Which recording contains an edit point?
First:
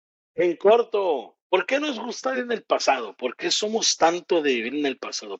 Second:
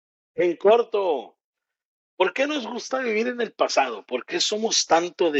first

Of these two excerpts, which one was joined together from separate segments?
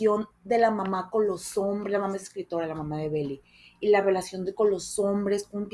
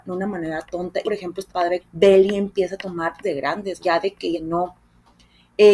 second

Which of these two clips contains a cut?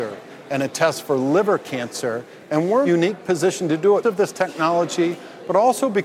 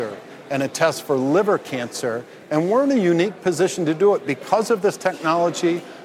first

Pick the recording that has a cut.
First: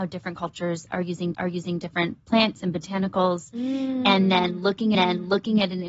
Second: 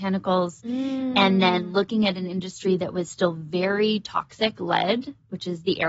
first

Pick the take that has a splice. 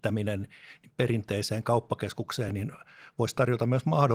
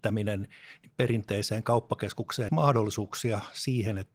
second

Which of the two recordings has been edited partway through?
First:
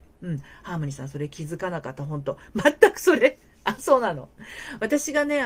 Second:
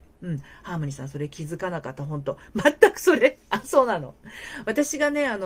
second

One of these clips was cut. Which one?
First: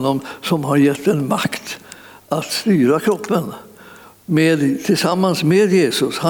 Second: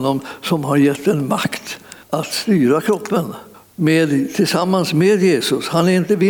second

